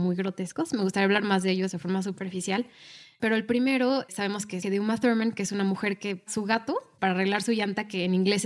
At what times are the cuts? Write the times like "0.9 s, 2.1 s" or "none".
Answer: 4.6 s